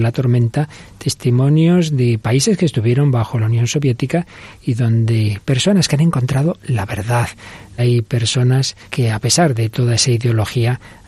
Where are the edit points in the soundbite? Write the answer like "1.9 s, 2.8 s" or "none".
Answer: 7.8 s, 8.8 s